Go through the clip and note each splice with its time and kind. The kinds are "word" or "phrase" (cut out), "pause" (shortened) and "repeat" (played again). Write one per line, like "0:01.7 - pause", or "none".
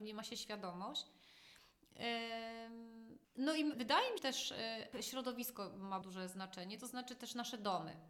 0:03.2 - pause
0:03.7 - word
0:04.2 - word
0:04.9 - phrase
0:06.0 - word